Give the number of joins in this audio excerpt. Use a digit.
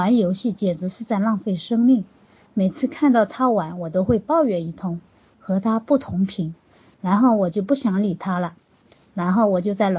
0